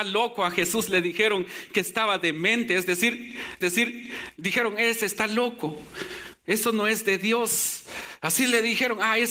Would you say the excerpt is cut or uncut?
cut